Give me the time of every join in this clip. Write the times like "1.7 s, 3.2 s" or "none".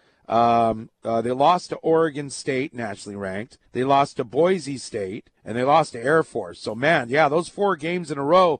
3.7 s, 5.4 s